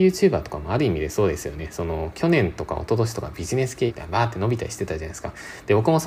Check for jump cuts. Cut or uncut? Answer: cut